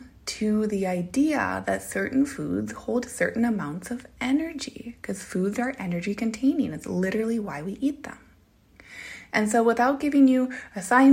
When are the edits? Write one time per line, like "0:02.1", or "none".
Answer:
none